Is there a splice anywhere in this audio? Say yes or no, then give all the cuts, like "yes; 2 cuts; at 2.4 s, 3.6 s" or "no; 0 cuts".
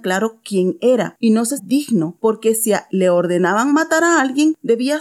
yes; 2 cuts; at 1.6 s, 2.9 s